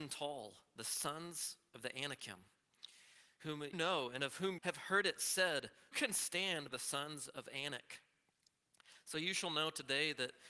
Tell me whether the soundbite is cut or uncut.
cut